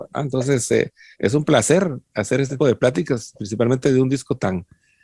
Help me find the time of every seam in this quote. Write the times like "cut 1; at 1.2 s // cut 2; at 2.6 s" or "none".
cut 1; at 1.1 s // cut 2; at 2.6 s